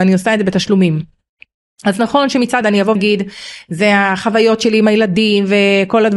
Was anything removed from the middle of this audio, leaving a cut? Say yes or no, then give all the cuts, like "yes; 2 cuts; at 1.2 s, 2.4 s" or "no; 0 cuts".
yes; 2 cuts; at 2.6 s, 3.0 s